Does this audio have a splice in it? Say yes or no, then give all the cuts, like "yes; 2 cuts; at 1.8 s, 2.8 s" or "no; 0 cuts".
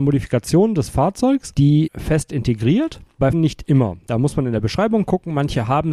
yes; 2 cuts; at 1.9 s, 3.3 s